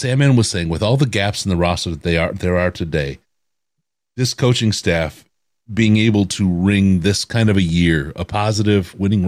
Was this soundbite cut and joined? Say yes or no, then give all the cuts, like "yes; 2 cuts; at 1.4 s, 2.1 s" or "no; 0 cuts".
no; 0 cuts